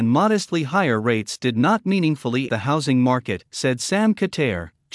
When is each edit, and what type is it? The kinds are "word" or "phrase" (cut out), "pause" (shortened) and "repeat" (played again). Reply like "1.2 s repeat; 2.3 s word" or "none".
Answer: 2.5 s word; 3.5 s pause